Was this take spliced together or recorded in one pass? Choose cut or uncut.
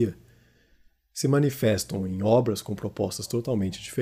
uncut